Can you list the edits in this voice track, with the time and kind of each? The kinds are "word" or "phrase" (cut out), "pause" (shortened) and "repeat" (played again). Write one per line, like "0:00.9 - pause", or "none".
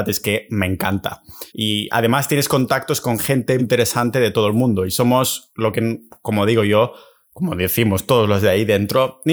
0:01.5 - pause
0:03.6 - word